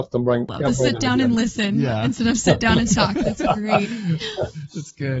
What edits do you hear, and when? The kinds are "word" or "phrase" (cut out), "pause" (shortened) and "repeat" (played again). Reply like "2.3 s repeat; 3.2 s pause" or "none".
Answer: none